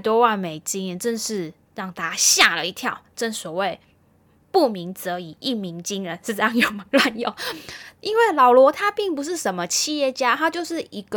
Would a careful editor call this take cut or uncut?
uncut